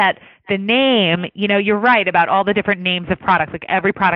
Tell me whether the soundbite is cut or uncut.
uncut